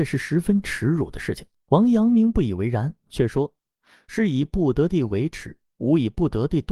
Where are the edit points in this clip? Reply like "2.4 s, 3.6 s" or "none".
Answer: none

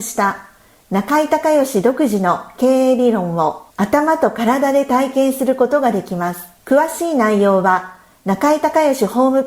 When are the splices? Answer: 3.7 s, 6.6 s

